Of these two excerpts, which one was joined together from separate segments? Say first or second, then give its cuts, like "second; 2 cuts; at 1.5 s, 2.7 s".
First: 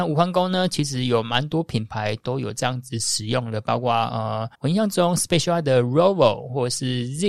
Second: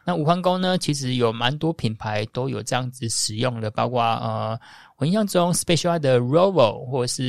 first; 1 cut; at 4.5 s